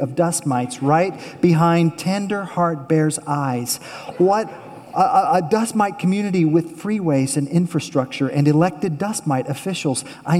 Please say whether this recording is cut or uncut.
uncut